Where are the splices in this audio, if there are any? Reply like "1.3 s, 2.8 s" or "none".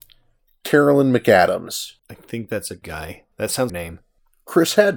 2.0 s, 2.8 s, 3.3 s, 3.7 s